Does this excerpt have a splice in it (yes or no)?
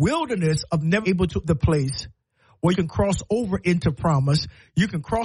yes